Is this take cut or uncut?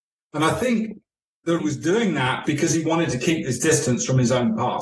cut